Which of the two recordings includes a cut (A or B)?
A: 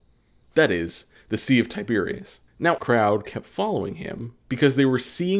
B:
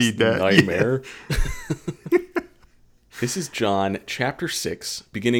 A